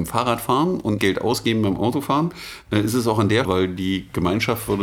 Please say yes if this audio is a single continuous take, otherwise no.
no